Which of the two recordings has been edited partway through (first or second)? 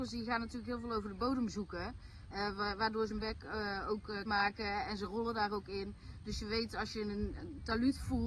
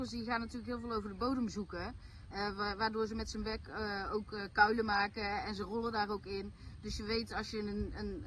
first